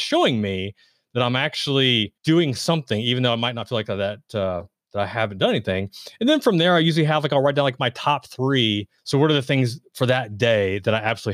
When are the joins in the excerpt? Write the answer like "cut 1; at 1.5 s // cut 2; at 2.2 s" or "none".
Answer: cut 1; at 2.2 s // cut 2; at 9.0 s